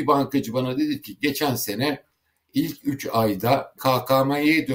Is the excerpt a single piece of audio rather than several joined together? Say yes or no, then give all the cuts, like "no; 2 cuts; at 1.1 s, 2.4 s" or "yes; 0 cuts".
no; 1 cut; at 3.8 s